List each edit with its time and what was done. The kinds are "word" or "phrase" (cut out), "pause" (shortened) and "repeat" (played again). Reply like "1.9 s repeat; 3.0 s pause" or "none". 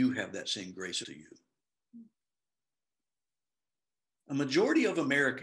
1.0 s word